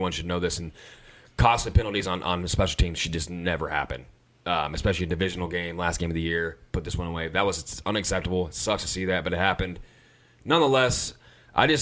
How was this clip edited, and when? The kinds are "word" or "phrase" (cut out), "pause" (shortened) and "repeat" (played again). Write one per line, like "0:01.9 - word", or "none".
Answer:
none